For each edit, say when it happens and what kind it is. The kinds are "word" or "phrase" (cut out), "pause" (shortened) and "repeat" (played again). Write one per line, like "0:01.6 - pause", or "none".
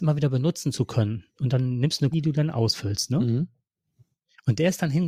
0:02.1 - word